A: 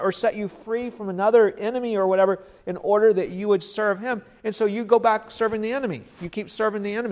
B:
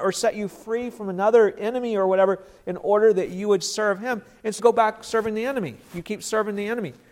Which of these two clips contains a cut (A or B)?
B